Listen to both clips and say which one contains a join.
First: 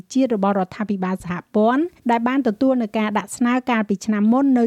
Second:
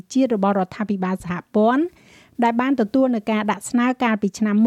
first; 1 cut; at 2.0 s

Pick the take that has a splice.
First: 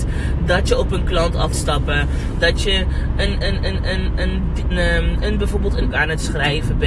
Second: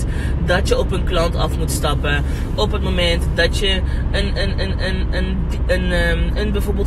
first; 4 cuts; at 1.5 s, 2.4 s, 4.7 s, 5.9 s

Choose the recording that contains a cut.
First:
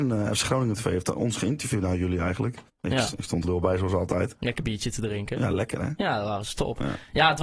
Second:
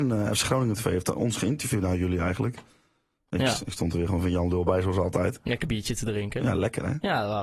first; 2 cuts; at 2.7 s, 3.4 s

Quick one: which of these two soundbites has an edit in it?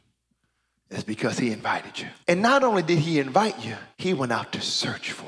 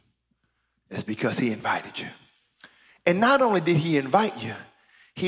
first; 2 cuts; at 2.2 s, 3.9 s

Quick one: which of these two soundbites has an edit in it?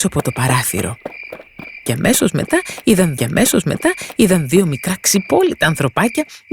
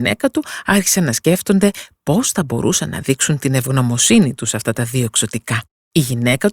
first; 1 cut; at 3.2 s

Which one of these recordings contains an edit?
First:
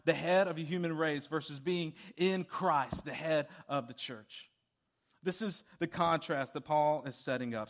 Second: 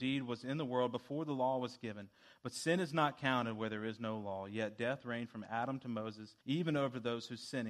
second; 1 cut; at 6.4 s

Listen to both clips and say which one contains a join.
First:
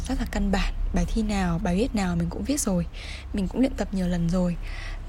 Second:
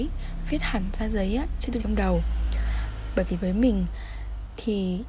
second; 1 cut; at 1.8 s

